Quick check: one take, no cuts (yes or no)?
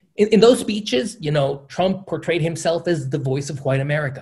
yes